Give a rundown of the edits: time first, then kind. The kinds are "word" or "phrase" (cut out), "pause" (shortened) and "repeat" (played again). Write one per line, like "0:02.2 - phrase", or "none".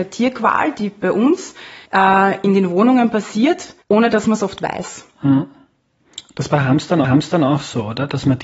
0:01.9 - pause
0:03.8 - pause
0:07.0 - repeat